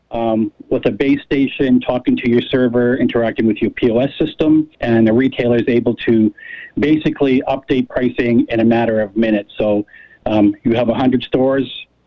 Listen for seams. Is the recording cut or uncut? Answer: cut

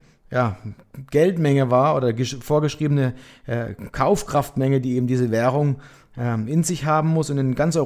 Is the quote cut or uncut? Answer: uncut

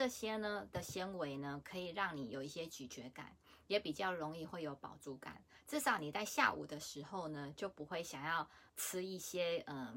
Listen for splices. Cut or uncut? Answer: cut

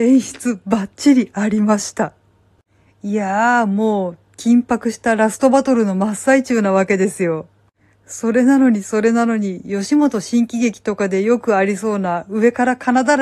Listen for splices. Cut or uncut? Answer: uncut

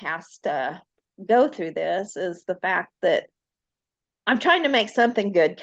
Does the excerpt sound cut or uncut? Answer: uncut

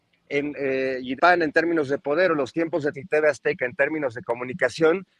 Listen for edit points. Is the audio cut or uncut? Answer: cut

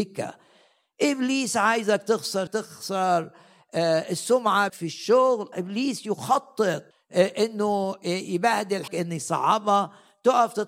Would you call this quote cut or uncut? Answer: cut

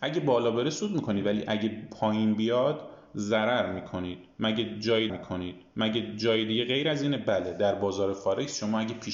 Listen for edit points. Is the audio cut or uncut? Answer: cut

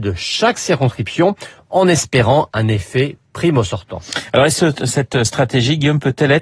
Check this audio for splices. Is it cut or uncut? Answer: uncut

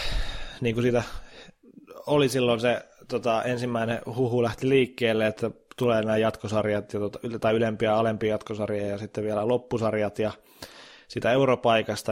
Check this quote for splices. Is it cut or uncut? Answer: uncut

